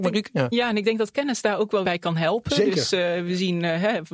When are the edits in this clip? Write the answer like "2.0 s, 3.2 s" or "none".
1.8 s